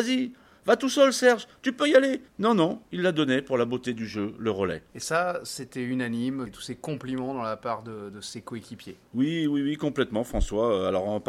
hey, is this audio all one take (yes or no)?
no